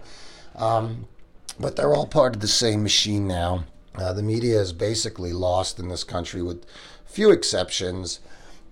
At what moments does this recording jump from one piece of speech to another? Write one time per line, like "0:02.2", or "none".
0:03.8